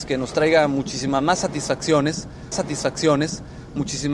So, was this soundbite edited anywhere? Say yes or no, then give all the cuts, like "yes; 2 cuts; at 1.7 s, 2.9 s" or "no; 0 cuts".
yes; 1 cut; at 2.5 s